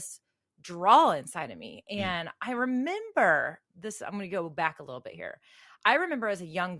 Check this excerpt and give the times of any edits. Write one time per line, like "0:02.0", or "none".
0:03.7